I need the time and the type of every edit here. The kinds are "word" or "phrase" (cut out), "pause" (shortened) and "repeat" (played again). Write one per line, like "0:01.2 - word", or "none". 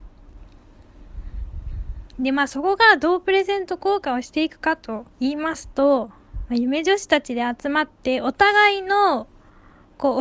0:05.1 - pause